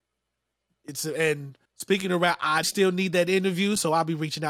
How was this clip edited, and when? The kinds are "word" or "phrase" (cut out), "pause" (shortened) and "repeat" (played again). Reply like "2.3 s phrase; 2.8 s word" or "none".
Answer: 1.7 s pause; 2.6 s word